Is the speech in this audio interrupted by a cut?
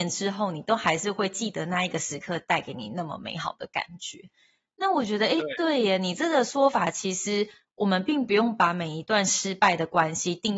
no; 0 cuts

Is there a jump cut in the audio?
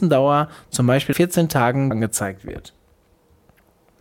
yes; 2 cuts; at 1.1 s, 1.9 s

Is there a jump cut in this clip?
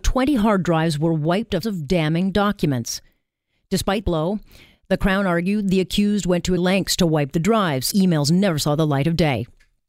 yes; 4 cuts; at 1.6 s, 4.0 s, 6.6 s, 7.9 s

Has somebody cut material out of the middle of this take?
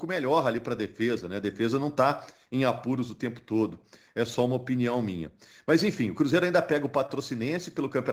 no; 0 cuts

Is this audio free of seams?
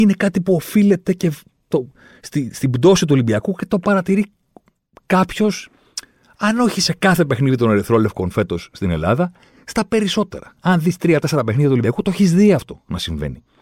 yes; 0 cuts

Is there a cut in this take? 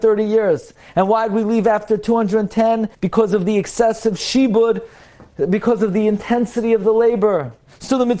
yes; 1 cut; at 2.9 s

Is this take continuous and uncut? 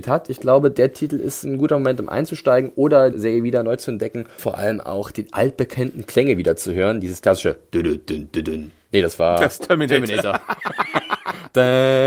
no; 2 cuts; at 3.1 s, 4.4 s

